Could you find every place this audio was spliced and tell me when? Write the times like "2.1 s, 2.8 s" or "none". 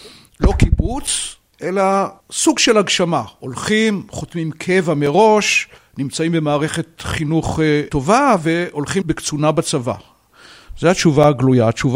2.2 s, 5.8 s, 9.0 s